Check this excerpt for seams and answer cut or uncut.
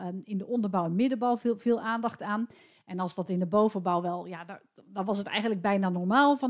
uncut